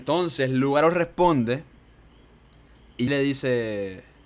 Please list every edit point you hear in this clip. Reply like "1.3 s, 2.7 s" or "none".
3.1 s